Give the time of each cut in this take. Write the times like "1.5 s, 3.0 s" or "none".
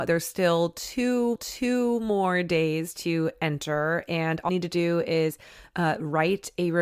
1.4 s, 4.5 s

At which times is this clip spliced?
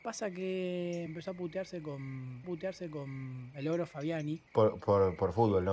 1.1 s, 2.4 s, 4.5 s

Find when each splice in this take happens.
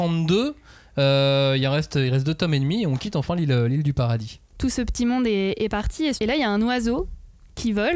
6.2 s

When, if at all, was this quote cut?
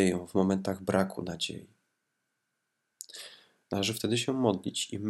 none

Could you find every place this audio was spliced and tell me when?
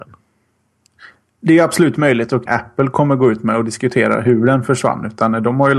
2.5 s

